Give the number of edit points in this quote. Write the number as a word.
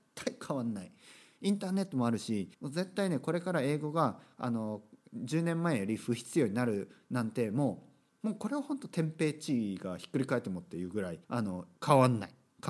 four